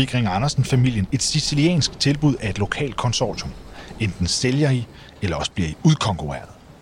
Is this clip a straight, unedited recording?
yes; 0 cuts

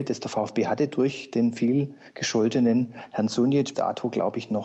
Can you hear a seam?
yes; 1 cut; at 3.7 s

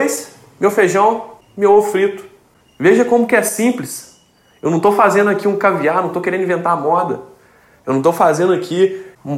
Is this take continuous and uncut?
yes; 0 cuts

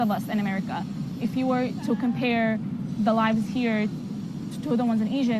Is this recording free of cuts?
no; 1 cut; at 1.2 s

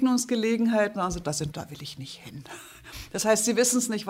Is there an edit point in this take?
yes; 2 cuts; at 1.0 s, 1.5 s

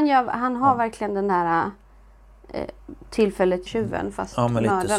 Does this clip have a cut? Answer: yes; 1 cut; at 3.7 s

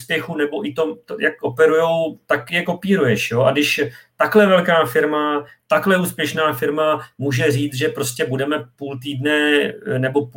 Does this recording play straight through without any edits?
yes; 0 cuts

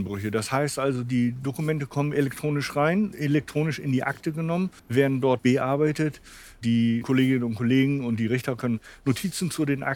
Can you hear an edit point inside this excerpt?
yes; 3 cuts; at 3.1 s, 4.8 s, 5.4 s

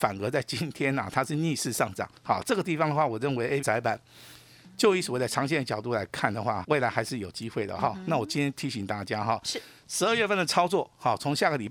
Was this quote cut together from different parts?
yes; 3 cuts; at 2.2 s, 3.6 s, 6.6 s

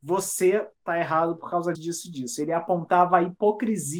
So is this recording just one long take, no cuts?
no; 1 cut; at 1.7 s

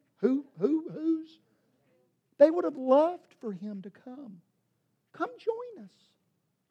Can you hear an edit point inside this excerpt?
no; 0 cuts

